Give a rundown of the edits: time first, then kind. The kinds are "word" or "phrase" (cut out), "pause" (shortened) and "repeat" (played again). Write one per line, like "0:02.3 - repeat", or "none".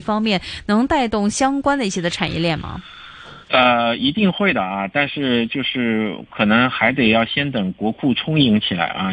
0:03.4 - pause